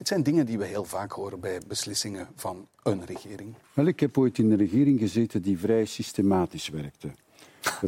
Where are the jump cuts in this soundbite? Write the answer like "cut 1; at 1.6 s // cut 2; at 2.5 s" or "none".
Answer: cut 1; at 3.6 s